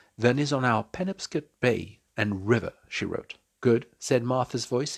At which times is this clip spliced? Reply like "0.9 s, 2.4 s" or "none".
1.5 s, 3.5 s